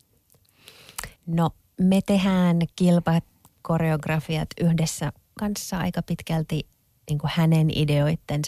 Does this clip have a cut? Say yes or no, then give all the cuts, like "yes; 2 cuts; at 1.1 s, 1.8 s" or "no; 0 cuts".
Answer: yes; 3 cuts; at 1.2 s, 2.7 s, 5.4 s